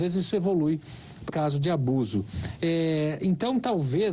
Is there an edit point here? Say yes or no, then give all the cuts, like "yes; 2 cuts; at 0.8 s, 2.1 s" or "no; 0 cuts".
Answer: yes; 1 cut; at 1.3 s